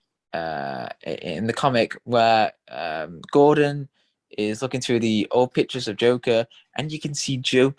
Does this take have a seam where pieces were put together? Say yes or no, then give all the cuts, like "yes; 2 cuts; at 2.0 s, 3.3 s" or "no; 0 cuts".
no; 0 cuts